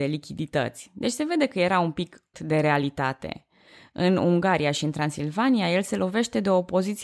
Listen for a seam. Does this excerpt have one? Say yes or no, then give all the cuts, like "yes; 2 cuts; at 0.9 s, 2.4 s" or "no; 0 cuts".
yes; 1 cut; at 2.3 s